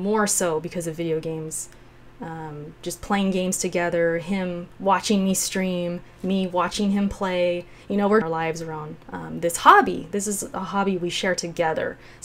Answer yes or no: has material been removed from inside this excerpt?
yes